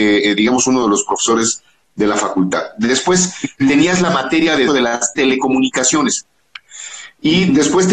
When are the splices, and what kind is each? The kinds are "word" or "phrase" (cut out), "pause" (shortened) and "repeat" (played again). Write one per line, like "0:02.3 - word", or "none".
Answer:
0:04.7 - word